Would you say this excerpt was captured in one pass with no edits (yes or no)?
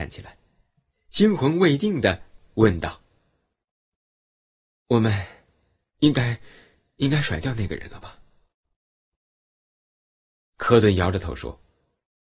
yes